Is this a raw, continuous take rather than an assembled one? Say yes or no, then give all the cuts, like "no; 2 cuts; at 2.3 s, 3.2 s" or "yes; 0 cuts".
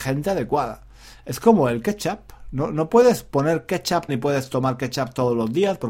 no; 1 cut; at 4.1 s